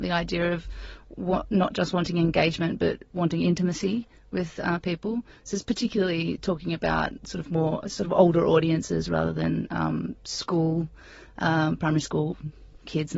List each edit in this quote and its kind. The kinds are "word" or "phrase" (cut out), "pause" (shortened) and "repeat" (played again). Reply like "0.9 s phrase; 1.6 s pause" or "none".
none

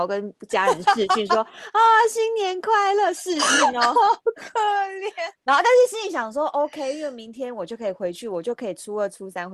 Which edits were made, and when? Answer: none

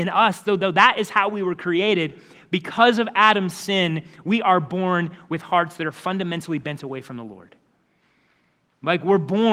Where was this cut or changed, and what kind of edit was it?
none

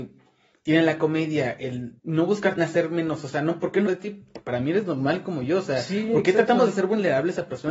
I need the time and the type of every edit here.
2.0 s pause; 2.6 s word; 3.9 s phrase

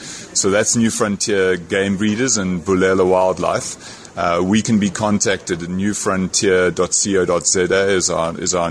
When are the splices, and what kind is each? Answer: none

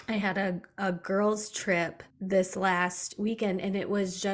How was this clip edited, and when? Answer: 2.1 s pause

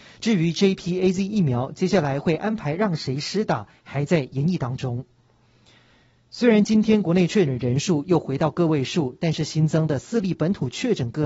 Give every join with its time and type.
none

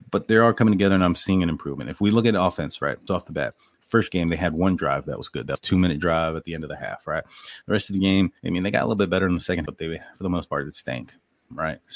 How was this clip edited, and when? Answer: 3.1 s word; 3.8 s word; 8.4 s pause; 9.7 s word

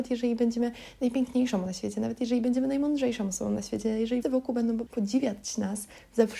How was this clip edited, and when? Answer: 1.7 s word; 4.2 s word; 4.9 s word

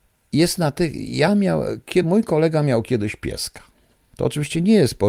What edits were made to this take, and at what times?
none

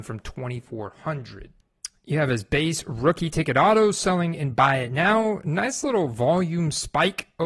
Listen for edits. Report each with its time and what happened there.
none

